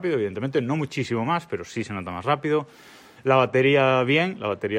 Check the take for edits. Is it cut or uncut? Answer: uncut